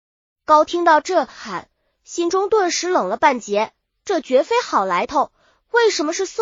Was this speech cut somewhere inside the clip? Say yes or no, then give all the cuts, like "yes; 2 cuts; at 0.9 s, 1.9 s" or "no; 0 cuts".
no; 0 cuts